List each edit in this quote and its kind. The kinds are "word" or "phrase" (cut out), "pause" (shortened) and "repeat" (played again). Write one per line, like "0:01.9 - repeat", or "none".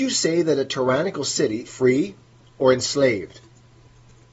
0:01.7 - word